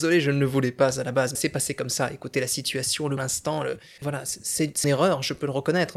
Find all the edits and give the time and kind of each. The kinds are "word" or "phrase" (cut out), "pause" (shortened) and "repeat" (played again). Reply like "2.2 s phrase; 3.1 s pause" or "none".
1.3 s word; 3.2 s word; 4.8 s word